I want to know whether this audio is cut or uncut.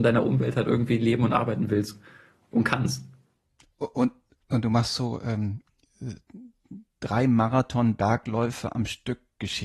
uncut